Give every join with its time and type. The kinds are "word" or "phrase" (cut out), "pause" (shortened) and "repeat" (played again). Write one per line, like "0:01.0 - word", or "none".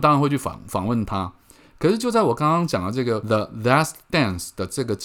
none